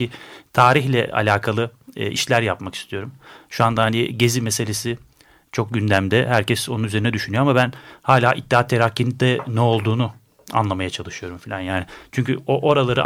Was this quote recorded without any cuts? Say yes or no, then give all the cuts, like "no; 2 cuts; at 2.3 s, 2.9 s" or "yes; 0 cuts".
yes; 0 cuts